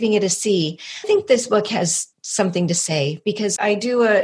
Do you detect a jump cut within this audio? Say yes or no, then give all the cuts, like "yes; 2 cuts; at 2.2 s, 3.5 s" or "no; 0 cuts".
yes; 1 cut; at 1.0 s